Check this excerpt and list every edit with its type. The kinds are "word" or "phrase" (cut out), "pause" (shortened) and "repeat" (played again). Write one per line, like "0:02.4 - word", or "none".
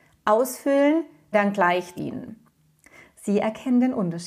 0:01.3 - phrase
0:02.0 - word